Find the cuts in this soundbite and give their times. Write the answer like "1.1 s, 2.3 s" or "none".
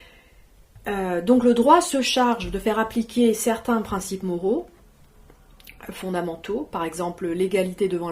none